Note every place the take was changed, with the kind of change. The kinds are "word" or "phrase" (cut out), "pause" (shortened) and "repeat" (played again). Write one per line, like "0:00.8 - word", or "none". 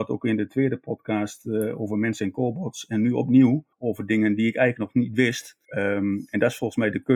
0:03.7 - pause
0:05.6 - pause